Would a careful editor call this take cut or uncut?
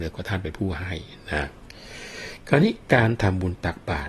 cut